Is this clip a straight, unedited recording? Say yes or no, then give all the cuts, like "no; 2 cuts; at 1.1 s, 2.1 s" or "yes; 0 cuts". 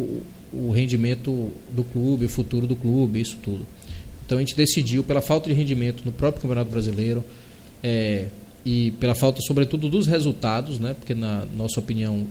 no; 1 cut; at 7.7 s